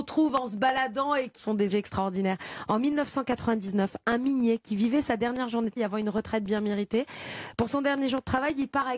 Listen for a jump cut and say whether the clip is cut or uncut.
cut